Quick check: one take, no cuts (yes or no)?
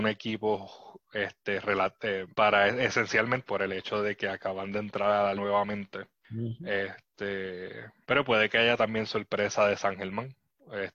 no